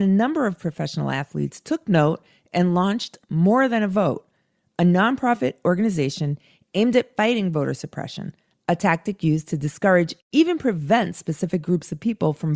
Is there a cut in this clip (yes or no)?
no